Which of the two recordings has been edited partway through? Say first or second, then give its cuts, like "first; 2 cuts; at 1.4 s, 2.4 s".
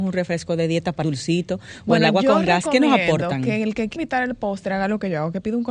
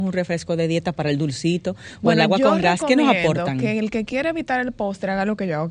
first; 2 cuts; at 1.0 s, 4.0 s